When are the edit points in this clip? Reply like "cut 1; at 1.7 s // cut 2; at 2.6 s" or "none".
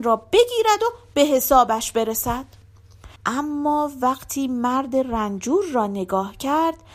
cut 1; at 3.2 s